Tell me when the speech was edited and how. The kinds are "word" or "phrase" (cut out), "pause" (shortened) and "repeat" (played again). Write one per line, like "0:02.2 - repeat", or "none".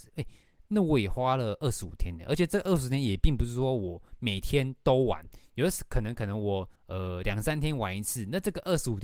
0:06.8 - pause